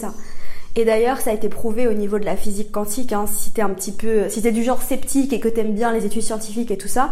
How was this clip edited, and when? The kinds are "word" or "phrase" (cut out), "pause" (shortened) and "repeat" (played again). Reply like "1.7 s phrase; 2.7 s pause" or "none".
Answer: none